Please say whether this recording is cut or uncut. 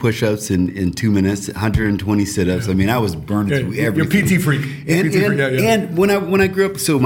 uncut